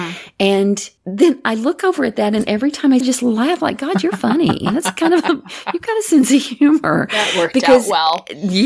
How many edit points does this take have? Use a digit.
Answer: 2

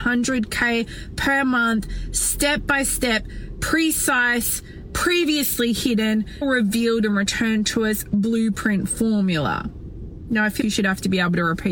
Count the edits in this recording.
2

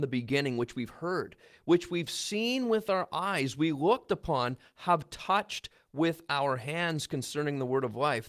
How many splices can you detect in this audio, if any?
0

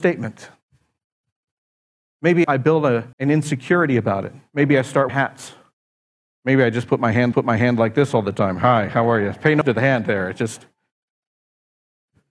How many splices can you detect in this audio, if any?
5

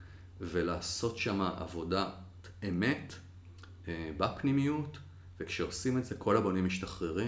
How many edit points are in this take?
0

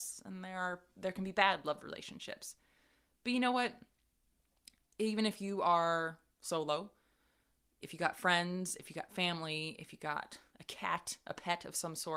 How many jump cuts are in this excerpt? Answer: 0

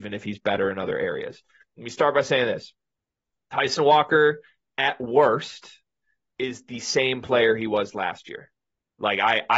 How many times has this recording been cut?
0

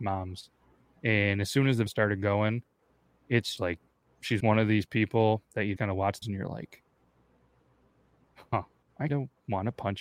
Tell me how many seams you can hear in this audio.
6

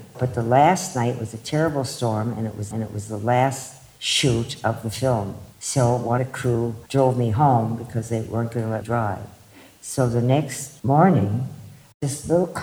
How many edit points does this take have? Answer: 5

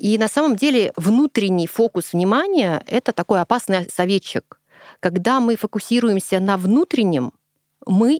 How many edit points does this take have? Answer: 0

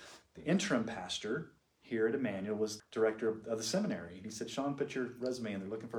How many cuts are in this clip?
1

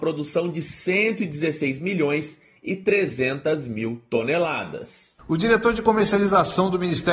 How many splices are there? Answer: 0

